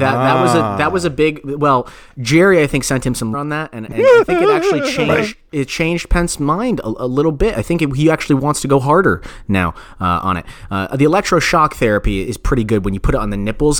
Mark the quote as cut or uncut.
cut